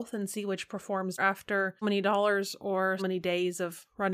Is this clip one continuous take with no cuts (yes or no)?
no